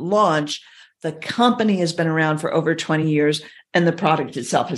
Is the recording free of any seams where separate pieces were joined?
yes; 0 cuts

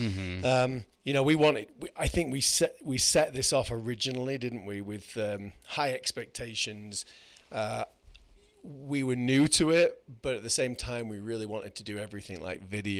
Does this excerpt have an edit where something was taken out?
yes; 2 cuts; at 0.9 s, 8.4 s

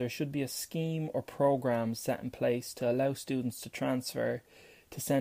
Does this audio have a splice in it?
no; 0 cuts

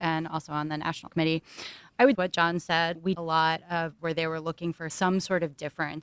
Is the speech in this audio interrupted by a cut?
yes; 4 cuts; at 1.1 s, 2.1 s, 3.1 s, 4.0 s

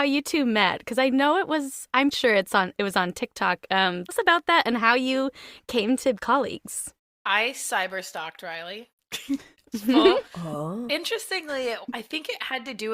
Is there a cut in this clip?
yes; 4 cuts; at 2.1 s, 4.1 s, 6.1 s, 10.9 s

